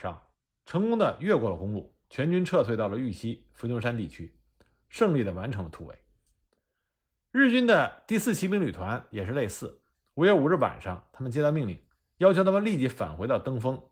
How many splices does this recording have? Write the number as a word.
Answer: one